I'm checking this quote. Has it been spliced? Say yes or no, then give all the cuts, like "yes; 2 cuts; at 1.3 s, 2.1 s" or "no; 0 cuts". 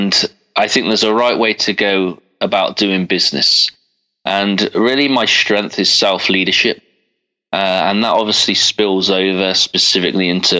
no; 0 cuts